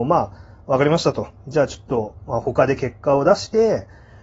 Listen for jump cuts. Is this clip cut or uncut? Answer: uncut